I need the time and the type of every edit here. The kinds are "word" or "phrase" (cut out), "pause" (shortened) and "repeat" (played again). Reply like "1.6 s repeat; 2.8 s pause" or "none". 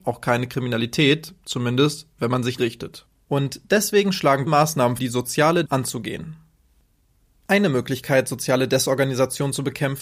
1.4 s pause; 2.6 s phrase; 3.1 s pause; 4.5 s phrase; 5.0 s phrase; 5.7 s word